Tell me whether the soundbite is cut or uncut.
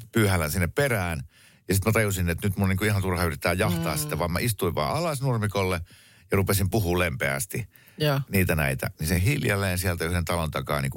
uncut